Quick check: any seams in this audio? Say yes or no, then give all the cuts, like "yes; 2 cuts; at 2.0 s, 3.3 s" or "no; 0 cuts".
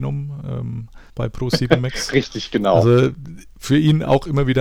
yes; 1 cut; at 1.1 s